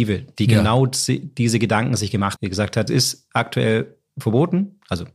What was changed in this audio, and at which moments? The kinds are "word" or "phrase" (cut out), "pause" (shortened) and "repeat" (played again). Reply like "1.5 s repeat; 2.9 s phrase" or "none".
2.4 s word; 2.9 s word